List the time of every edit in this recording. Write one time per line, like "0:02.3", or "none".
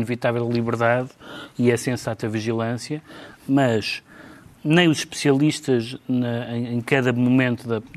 none